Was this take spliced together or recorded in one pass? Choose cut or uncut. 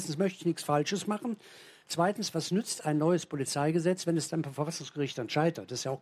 uncut